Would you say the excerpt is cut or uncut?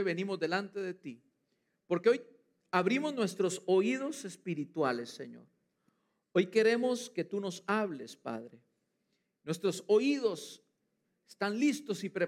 uncut